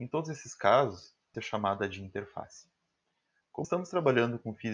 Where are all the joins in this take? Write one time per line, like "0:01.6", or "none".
0:01.3
0:03.6